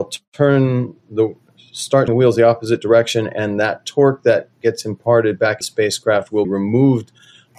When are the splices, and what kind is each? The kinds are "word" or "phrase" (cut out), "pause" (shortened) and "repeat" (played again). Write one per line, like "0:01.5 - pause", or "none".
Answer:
0:01.0 - pause
0:02.1 - word
0:05.6 - phrase
0:06.4 - word